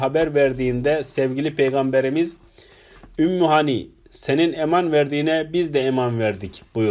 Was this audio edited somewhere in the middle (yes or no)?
no